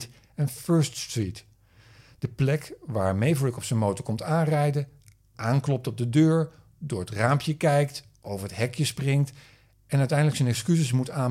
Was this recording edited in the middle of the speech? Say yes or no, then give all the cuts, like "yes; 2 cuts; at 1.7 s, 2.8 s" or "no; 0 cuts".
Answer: no; 0 cuts